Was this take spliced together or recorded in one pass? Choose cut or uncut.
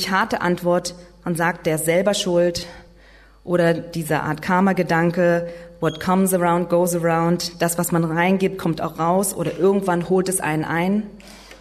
uncut